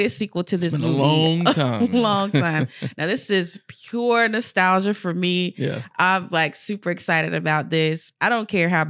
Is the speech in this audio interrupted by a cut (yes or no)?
no